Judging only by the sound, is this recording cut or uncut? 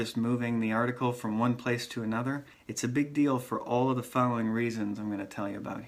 cut